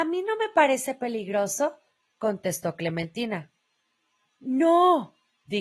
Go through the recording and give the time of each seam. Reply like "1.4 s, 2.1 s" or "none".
none